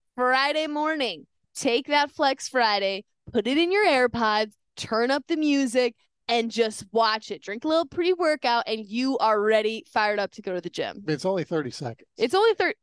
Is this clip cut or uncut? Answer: uncut